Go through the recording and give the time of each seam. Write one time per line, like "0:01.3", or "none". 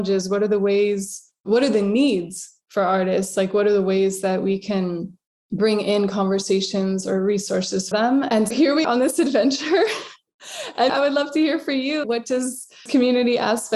0:07.9
0:08.5
0:08.8
0:10.9
0:12.0
0:12.9